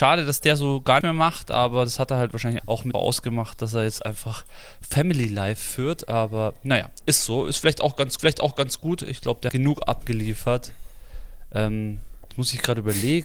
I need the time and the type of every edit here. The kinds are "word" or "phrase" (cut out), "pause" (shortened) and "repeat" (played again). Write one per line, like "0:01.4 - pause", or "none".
0:01.0 - word
0:02.6 - word
0:02.9 - phrase
0:04.0 - word
0:08.2 - repeat
0:09.5 - word